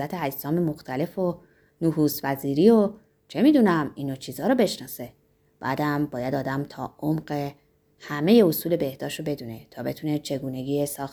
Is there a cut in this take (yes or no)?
no